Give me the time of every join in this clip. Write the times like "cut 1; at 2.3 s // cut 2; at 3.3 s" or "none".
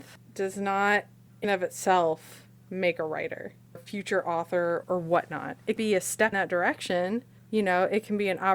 cut 1; at 1.4 s // cut 2; at 3.8 s // cut 3; at 4.8 s // cut 4; at 5.8 s // cut 5; at 6.3 s